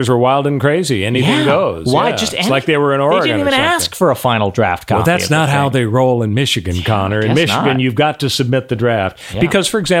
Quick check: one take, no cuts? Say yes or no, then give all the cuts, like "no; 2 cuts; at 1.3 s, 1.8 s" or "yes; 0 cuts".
yes; 0 cuts